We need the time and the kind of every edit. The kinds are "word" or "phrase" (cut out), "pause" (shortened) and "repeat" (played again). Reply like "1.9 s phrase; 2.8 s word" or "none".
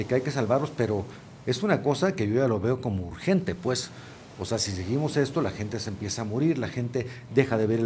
none